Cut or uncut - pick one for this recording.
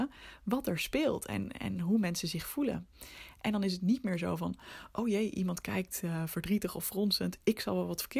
uncut